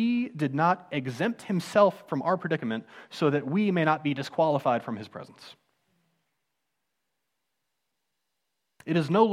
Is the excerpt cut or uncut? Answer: uncut